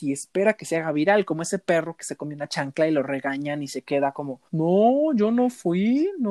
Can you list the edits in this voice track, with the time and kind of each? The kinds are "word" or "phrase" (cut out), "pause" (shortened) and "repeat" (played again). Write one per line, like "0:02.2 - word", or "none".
0:04.5 - pause

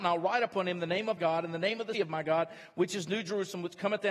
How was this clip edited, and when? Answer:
0:01.2 - word
0:01.9 - word

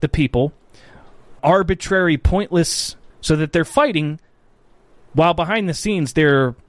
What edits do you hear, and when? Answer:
0:01.4 - word
0:03.1 - word

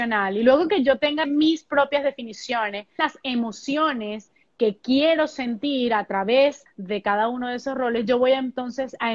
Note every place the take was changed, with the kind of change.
0:01.2 - word
0:03.0 - word
0:06.7 - word

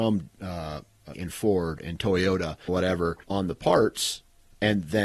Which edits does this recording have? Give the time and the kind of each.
0:01.1 - word
0:02.7 - word
0:03.2 - word

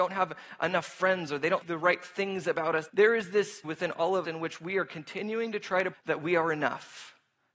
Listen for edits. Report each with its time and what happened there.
0:01.6 - word
0:02.9 - word
0:03.6 - word
0:04.2 - word
0:05.9 - word

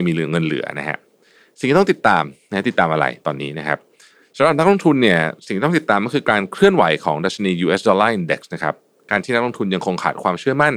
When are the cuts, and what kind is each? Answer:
none

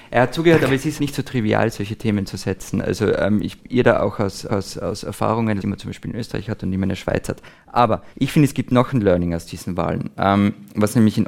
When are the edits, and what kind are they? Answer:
0:01.0 - word
0:03.6 - phrase
0:04.5 - repeat
0:05.6 - word
0:08.1 - pause

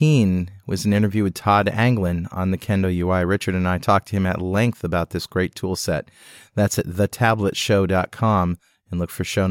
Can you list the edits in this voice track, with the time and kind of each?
none

